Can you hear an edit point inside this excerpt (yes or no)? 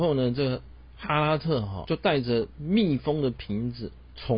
yes